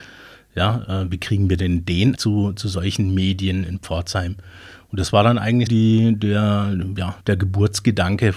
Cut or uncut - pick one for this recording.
cut